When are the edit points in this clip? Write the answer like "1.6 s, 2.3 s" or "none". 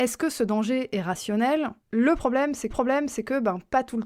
1.8 s, 2.7 s